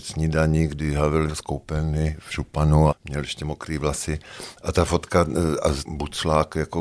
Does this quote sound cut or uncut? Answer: cut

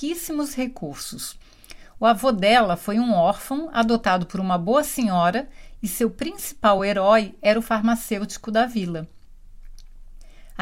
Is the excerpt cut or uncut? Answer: uncut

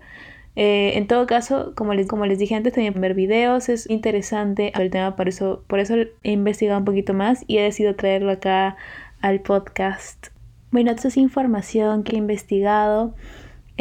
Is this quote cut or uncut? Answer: cut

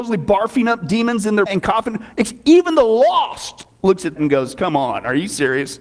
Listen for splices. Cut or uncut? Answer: cut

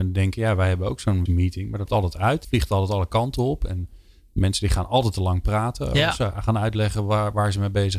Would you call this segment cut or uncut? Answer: cut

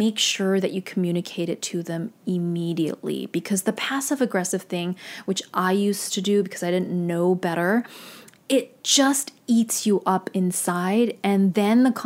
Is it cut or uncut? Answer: uncut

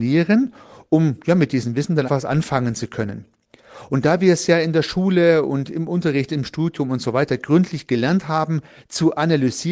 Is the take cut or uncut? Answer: cut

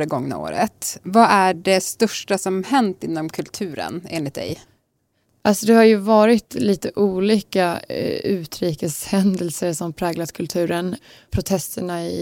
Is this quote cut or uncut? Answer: uncut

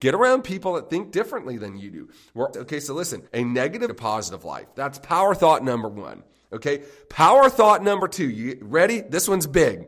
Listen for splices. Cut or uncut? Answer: cut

